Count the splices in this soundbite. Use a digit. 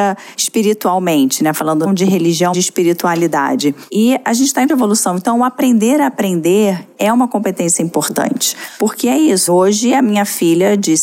4